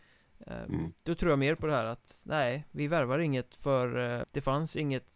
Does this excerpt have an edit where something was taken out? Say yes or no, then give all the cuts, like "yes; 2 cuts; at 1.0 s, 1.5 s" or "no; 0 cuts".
yes; 2 cuts; at 1.0 s, 4.2 s